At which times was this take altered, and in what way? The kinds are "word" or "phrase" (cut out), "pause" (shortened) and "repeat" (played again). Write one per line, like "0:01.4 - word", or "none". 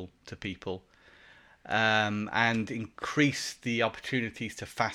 none

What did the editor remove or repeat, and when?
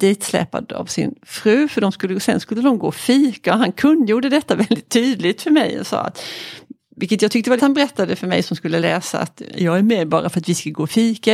0:07.6 - phrase

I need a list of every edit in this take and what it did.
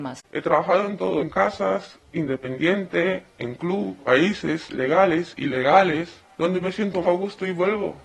0:01.2 - phrase
0:04.0 - word
0:06.2 - pause
0:07.0 - word

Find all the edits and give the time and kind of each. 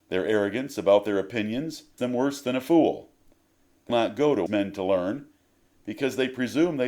0:02.0 - word
0:03.9 - word
0:04.5 - word

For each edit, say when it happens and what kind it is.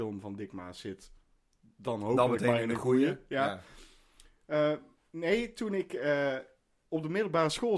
none

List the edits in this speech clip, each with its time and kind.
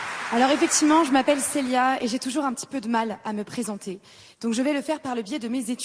none

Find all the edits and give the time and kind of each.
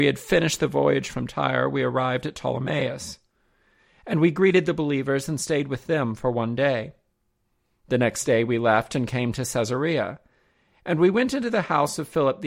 none

